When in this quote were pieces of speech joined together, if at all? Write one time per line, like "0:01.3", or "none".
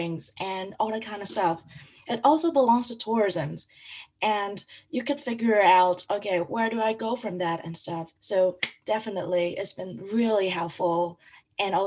0:08.2